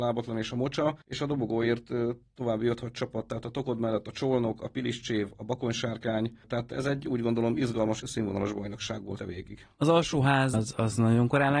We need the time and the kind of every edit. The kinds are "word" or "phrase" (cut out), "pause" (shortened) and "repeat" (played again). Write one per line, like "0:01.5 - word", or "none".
0:01.0 - pause
0:08.0 - word
0:09.2 - word
0:10.5 - word

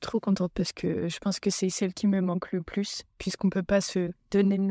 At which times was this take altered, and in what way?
none

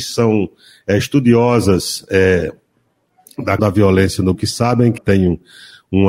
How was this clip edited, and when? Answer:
0:03.6 - word
0:04.3 - word
0:05.0 - word

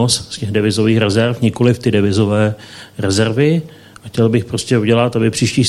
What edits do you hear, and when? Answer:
none

